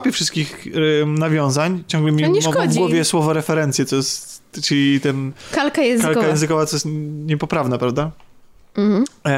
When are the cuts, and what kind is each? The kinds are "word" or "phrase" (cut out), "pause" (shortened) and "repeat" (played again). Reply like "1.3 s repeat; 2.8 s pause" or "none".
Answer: none